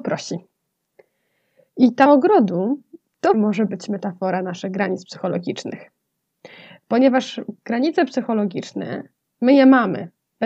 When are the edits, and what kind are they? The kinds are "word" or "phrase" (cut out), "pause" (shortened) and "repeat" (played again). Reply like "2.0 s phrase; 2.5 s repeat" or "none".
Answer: 2.1 s word; 3.3 s word